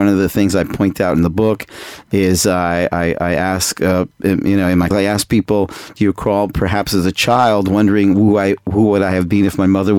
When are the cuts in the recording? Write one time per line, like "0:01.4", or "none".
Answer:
0:04.9